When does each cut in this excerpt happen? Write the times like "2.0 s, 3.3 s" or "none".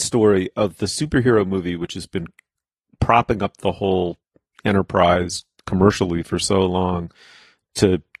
none